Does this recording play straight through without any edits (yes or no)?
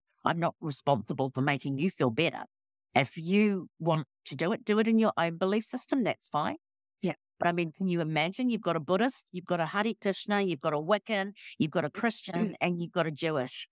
yes